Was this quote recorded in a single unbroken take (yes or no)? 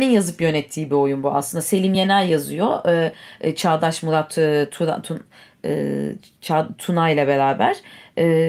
yes